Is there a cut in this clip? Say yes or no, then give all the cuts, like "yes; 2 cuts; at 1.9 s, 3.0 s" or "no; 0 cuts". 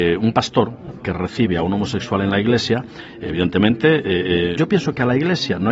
yes; 1 cut; at 4.6 s